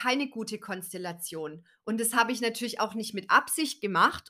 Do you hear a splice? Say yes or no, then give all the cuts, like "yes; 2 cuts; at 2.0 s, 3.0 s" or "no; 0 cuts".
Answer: no; 0 cuts